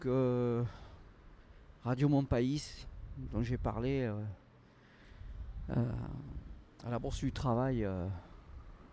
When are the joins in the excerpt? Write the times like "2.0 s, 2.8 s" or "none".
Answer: none